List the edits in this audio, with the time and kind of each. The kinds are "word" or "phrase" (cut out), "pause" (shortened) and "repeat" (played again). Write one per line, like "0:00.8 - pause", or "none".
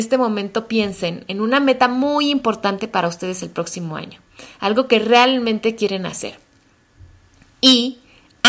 none